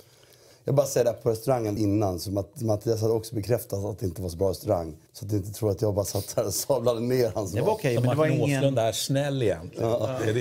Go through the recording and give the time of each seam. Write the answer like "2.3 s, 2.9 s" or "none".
1.8 s, 5.1 s